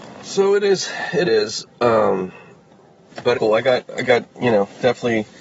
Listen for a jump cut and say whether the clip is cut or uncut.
cut